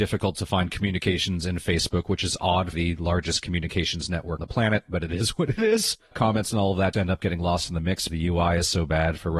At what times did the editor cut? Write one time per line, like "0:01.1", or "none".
0:02.7
0:04.4
0:06.1
0:06.9
0:08.1